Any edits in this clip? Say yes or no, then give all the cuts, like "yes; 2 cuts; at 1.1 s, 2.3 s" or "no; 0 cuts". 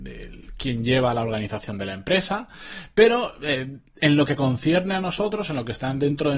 no; 0 cuts